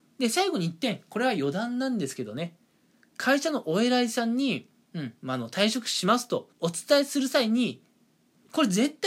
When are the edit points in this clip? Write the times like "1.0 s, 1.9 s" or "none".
6.5 s